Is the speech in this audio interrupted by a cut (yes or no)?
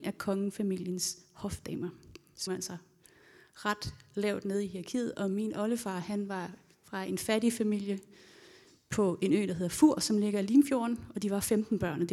yes